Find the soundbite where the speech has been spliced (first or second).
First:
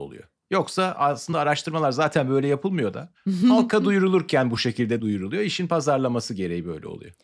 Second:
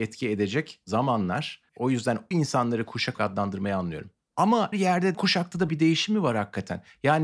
second